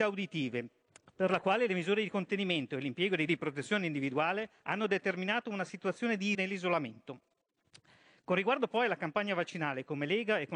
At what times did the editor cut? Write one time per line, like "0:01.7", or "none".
0:03.3
0:04.6
0:06.3